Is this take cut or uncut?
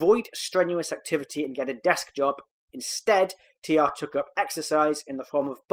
uncut